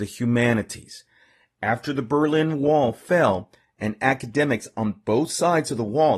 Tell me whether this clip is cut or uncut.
uncut